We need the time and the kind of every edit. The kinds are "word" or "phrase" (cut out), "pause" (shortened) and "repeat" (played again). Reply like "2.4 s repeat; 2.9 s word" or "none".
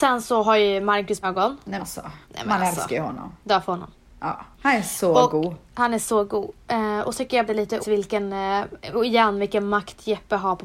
1.2 s phrase; 1.8 s word; 2.2 s pause; 3.4 s pause; 4.5 s pause; 5.6 s pause; 7.1 s word; 7.5 s phrase; 7.8 s word